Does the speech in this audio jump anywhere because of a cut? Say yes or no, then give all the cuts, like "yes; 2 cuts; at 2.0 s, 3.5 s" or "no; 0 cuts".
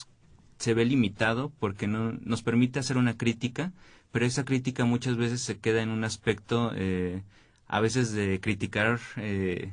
no; 0 cuts